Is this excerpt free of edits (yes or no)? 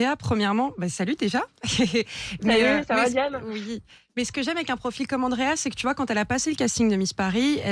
yes